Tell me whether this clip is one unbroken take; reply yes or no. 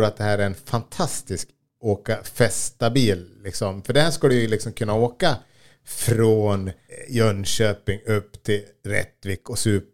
yes